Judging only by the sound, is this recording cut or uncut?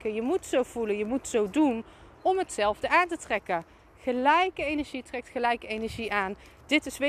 uncut